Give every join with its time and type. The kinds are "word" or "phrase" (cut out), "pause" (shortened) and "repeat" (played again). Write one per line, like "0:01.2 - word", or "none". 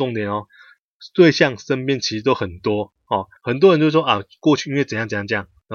0:03.4 - pause

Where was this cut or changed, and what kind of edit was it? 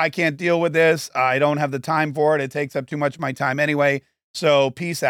none

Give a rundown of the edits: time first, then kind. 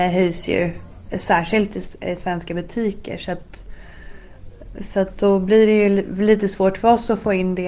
none

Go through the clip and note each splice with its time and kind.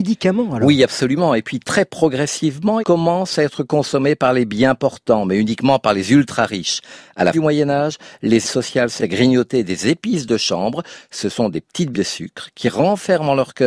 0:02.8 - word
0:07.3 - word
0:08.4 - word
0:09.0 - word
0:11.9 - word

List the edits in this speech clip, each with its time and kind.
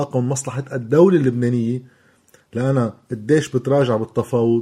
none

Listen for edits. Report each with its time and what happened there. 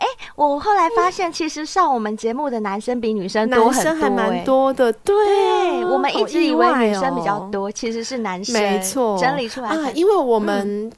none

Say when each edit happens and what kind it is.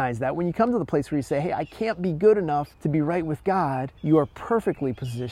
0:02.7 - pause
0:04.0 - pause

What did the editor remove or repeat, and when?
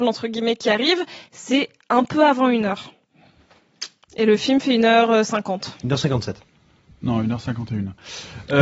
none

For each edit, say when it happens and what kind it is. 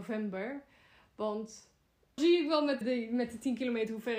0:02.2 - word
0:02.8 - word

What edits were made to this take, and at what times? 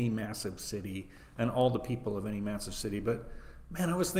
none

